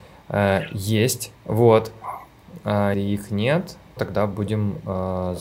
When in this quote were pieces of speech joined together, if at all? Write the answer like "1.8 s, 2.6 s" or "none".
1.3 s, 2.9 s, 4.0 s